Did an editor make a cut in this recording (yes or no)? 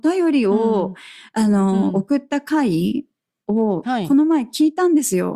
no